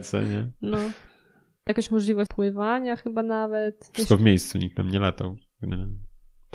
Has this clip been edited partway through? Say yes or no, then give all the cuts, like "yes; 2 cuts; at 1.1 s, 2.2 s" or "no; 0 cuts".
yes; 2 cuts; at 1.7 s, 2.3 s